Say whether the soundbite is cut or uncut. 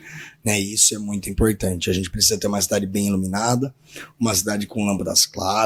uncut